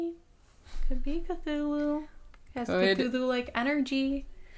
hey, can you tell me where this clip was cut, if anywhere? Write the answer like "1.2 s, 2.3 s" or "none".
none